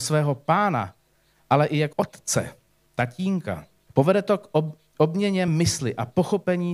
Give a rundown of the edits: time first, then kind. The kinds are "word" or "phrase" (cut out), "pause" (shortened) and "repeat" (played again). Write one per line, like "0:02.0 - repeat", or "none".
0:01.9 - word
0:03.9 - pause
0:05.5 - word